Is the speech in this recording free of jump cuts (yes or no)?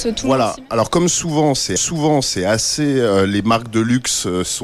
no